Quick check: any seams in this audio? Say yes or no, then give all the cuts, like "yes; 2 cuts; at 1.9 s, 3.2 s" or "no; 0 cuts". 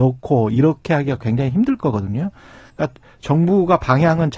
no; 0 cuts